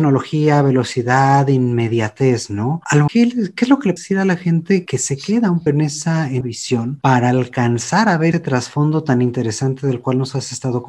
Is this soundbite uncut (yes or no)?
no